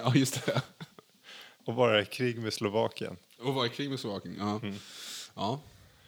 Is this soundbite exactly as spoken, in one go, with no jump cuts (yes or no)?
no